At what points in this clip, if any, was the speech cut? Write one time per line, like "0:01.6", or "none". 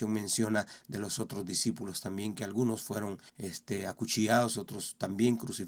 0:03.3

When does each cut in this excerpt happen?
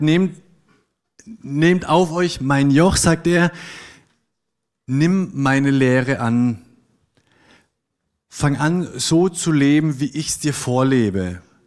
none

